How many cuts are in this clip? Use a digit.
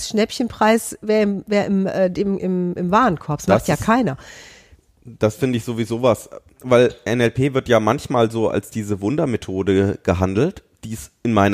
0